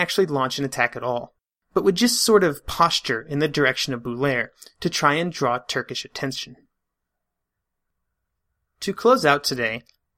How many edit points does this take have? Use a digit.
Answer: 0